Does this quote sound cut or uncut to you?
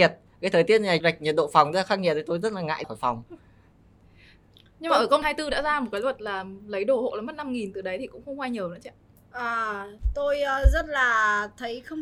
cut